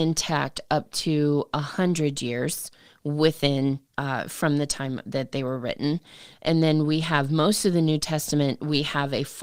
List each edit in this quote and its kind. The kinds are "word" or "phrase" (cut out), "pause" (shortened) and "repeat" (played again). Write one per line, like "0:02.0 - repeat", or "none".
0:03.9 - pause